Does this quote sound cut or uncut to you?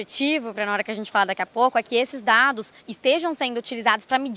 cut